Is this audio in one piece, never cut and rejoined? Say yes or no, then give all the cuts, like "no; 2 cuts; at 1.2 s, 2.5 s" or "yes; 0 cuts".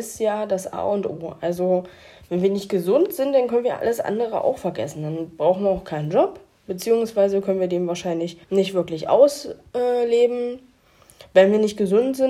no; 1 cut; at 8.4 s